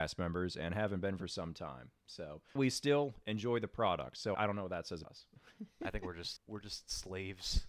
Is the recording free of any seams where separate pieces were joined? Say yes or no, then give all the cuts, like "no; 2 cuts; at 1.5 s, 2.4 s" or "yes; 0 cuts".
no; 5 cuts; at 2.6 s, 4.3 s, 5.0 s, 5.4 s, 6.4 s